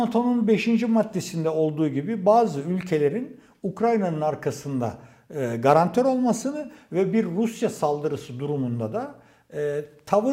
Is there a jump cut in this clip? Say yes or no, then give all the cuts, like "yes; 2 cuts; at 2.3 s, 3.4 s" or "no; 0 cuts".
no; 0 cuts